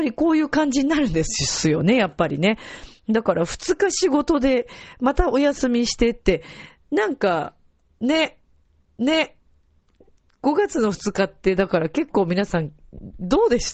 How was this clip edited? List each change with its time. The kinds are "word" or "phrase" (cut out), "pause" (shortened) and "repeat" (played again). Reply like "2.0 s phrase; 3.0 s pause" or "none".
8.9 s repeat